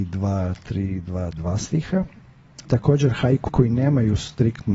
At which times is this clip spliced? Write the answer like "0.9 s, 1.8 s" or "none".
1.3 s, 2.6 s, 3.5 s